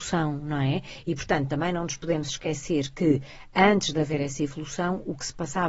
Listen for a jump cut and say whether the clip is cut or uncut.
uncut